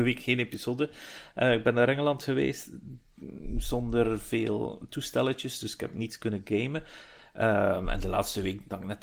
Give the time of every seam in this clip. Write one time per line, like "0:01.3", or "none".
none

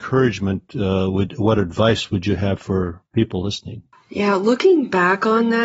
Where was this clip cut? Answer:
none

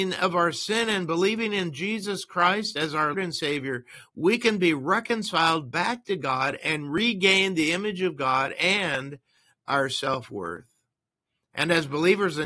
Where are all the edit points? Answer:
0:03.1

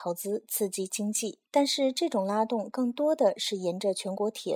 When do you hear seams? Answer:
0:01.5

